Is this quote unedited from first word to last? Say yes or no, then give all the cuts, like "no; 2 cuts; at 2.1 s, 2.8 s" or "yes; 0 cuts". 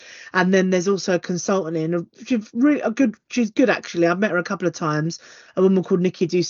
yes; 0 cuts